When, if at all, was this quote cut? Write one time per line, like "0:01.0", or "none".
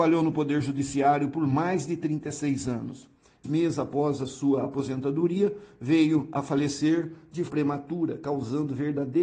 0:03.4
0:07.5